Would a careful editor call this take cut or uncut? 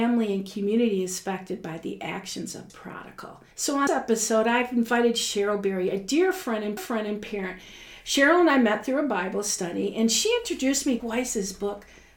cut